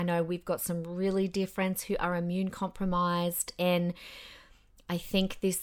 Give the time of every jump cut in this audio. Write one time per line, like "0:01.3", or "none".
none